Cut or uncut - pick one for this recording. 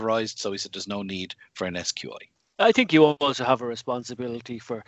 uncut